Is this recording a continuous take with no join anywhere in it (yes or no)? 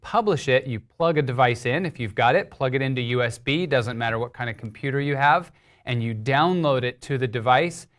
yes